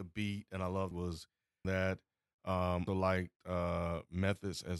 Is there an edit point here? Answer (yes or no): yes